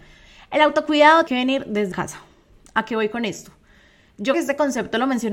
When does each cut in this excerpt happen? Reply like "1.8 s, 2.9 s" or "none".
1.3 s, 1.9 s, 4.3 s